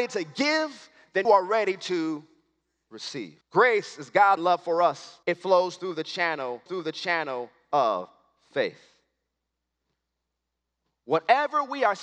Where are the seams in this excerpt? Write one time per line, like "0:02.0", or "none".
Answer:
0:01.2
0:03.4
0:04.4
0:05.2
0:06.7